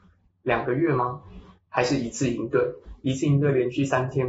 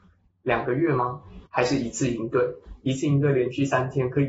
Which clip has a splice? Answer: second; 1 cut; at 1.4 s

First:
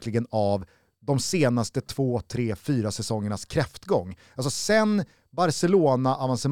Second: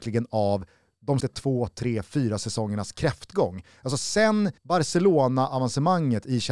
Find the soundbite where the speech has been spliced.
second; 2 cuts; at 1.2 s, 4.6 s

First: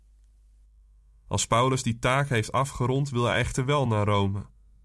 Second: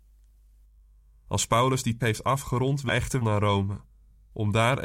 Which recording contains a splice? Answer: second; 3 cuts; at 2.0 s, 2.9 s, 3.2 s

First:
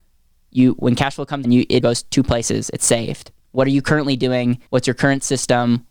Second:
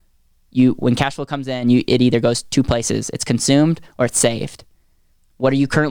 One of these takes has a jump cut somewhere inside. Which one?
first; 5 cuts; at 1.4 s, 1.8 s, 2.8 s, 3.4 s, 4.7 s

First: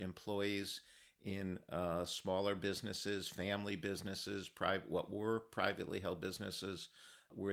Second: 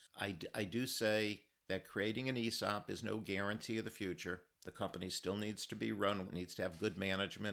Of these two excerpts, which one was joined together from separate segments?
second; 2 cuts; at 4.5 s, 6.2 s

